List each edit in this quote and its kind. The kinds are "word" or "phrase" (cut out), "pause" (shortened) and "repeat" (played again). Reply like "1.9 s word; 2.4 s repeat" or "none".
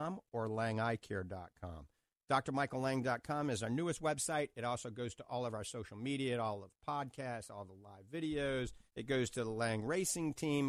8.9 s pause